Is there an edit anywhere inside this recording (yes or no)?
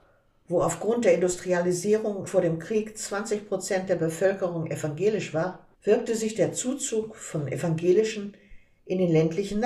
yes